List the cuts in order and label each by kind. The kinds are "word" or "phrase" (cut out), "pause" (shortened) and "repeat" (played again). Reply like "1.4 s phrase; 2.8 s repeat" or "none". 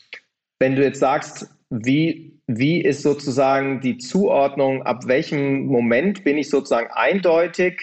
none